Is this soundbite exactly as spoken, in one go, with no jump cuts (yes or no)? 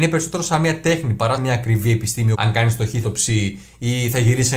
no